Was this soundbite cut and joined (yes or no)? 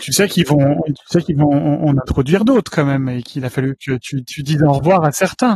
no